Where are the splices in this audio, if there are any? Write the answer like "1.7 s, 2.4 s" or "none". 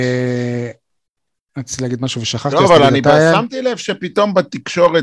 none